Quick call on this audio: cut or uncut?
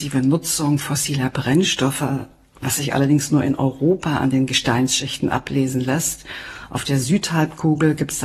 uncut